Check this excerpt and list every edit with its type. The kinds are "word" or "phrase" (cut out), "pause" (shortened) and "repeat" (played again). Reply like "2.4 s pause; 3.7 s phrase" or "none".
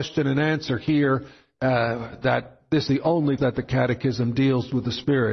2.9 s word; 3.4 s word